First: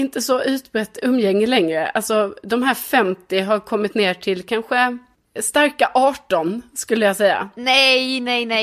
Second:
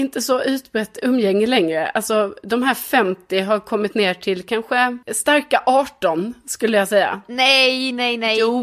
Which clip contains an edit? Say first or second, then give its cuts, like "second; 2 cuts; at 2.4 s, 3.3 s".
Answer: second; 1 cut; at 5.0 s